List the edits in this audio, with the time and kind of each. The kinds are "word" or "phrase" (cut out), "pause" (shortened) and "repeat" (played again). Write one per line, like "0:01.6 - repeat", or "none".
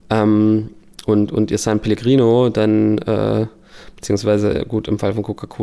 none